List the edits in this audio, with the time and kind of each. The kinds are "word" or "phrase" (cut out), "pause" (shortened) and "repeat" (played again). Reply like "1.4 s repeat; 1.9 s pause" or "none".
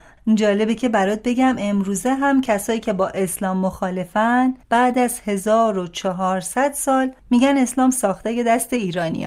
4.6 s pause; 7.2 s pause